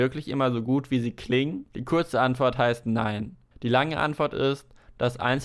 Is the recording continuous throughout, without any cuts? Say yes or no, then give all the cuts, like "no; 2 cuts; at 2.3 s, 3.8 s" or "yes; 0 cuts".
no; 2 cuts; at 1.7 s, 3.5 s